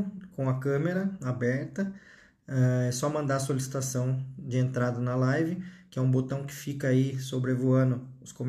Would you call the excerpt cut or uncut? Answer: uncut